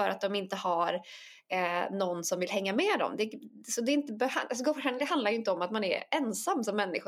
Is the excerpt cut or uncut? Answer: uncut